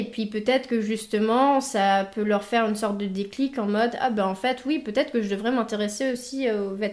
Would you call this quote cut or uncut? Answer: uncut